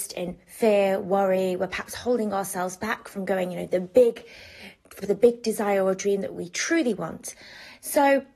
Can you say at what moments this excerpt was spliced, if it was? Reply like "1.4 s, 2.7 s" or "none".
5.0 s